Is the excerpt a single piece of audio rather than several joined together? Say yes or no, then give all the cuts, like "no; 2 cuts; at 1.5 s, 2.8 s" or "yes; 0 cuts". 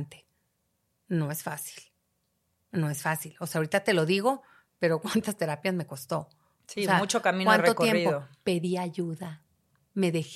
yes; 0 cuts